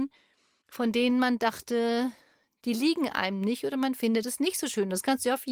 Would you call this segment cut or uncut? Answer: uncut